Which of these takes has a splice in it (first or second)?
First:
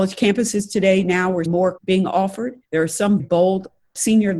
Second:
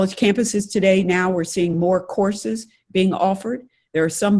first